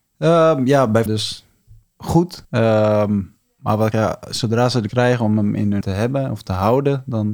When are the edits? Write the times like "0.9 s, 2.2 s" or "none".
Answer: 1.1 s, 2.4 s, 3.9 s, 4.9 s, 5.8 s

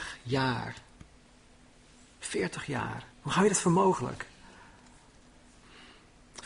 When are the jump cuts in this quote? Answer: 3.1 s

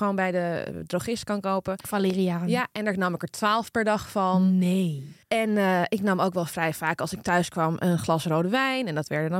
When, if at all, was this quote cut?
5.2 s

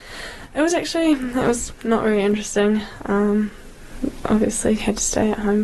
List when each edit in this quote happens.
none

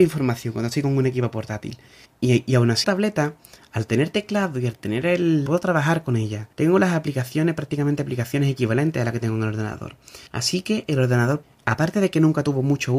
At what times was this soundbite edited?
2.1 s, 2.8 s, 5.5 s, 6.5 s, 10.3 s, 11.4 s

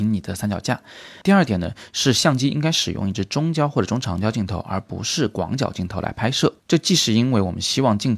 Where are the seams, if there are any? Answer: 6.6 s

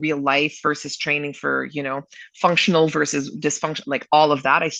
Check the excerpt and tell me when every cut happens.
none

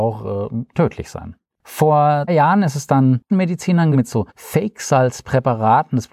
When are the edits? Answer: 2.3 s, 3.3 s, 3.9 s, 4.3 s

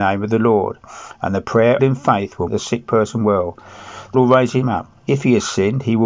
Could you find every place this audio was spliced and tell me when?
1.8 s, 2.5 s, 4.1 s, 5.0 s

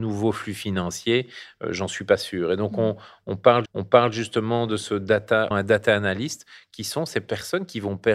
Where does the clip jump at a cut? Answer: 3.6 s, 5.5 s

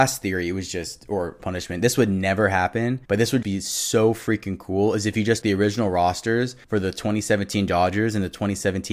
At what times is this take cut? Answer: 1.4 s, 3.0 s, 3.4 s, 5.4 s, 6.6 s

